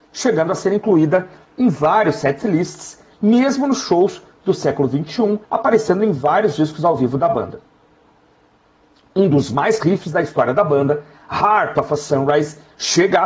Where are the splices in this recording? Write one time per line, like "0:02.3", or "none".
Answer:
0:05.4
0:09.8